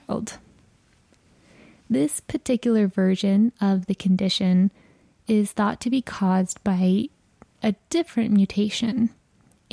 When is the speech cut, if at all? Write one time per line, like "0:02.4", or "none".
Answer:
none